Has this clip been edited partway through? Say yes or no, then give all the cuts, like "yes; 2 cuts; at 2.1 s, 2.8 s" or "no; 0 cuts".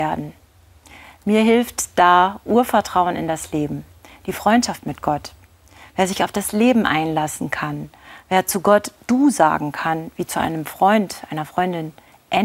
no; 0 cuts